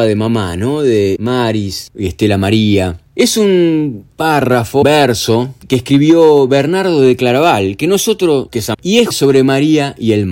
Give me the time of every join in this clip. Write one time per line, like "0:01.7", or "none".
0:01.2
0:04.8
0:08.7
0:09.1